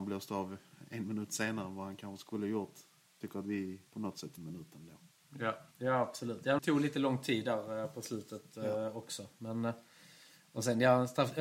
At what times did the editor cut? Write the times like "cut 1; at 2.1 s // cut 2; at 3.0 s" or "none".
cut 1; at 3.2 s // cut 2; at 3.9 s // cut 3; at 4.4 s // cut 4; at 5.7 s // cut 5; at 6.6 s